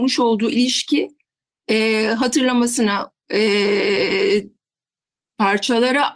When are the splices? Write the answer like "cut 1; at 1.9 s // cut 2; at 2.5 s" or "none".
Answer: none